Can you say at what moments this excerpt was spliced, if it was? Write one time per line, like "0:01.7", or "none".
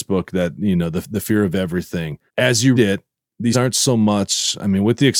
0:02.3
0:02.8
0:03.5